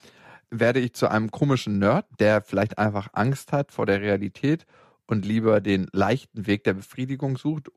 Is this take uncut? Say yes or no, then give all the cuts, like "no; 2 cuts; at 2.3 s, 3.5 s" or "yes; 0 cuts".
yes; 0 cuts